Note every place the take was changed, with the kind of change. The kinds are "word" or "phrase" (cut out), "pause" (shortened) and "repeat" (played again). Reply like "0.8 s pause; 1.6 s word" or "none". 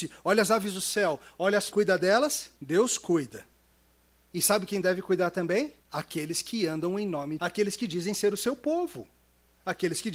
1.7 s phrase; 2.6 s pause; 5.8 s pause; 7.4 s phrase